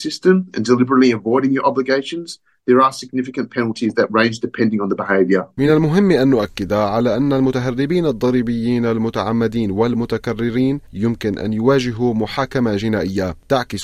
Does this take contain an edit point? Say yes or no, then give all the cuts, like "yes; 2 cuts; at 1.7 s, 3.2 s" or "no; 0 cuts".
no; 0 cuts